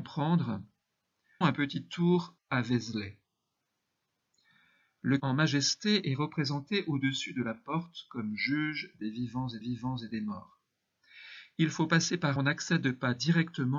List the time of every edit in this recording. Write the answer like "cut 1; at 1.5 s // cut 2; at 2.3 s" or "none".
cut 1; at 1.4 s // cut 2; at 2.4 s // cut 3; at 5.2 s // cut 4; at 9.6 s // cut 5; at 12.4 s